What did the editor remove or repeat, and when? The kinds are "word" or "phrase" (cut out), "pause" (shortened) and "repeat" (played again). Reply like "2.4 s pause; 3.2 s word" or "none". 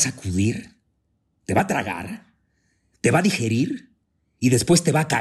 none